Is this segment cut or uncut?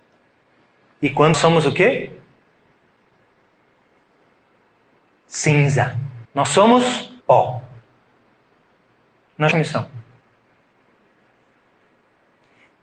cut